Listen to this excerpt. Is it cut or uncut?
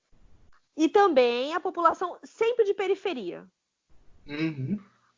uncut